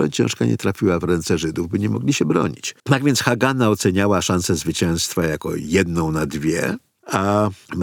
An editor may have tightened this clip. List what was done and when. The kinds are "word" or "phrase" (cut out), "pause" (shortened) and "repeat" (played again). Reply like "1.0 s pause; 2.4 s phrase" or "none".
2.8 s pause